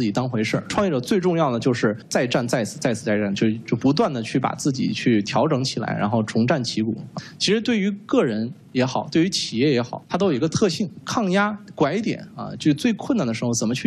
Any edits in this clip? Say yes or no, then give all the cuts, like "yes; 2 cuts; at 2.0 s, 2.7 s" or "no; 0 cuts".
yes; 1 cut; at 10.0 s